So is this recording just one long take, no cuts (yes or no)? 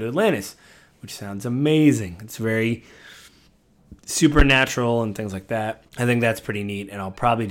no